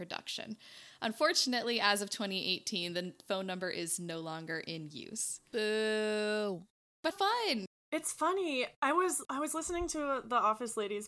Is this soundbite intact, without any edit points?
no; 2 cuts; at 7.1 s, 9.2 s

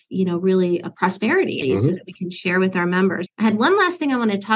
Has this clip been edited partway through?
yes; 2 cuts; at 1.6 s, 3.3 s

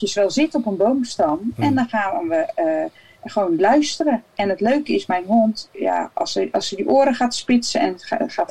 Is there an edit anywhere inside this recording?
yes; 1 cut; at 5.7 s

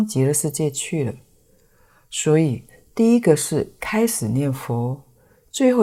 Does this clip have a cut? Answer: no; 0 cuts

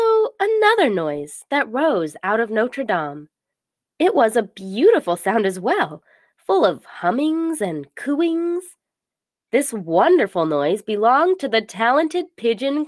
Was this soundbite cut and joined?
no; 0 cuts

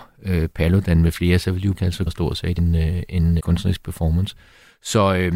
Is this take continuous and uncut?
no; 4 cuts; at 1.7 s, 2.1 s, 2.6 s, 3.4 s

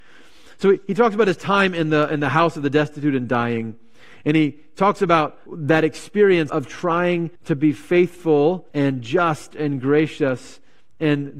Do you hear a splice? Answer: yes; 4 cuts; at 5.5 s, 6.5 s, 7.4 s, 8.7 s

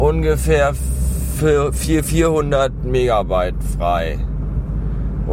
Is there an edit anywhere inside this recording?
no; 0 cuts

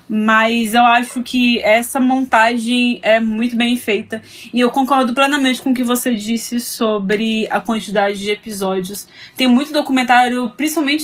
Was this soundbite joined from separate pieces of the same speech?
no; 0 cuts

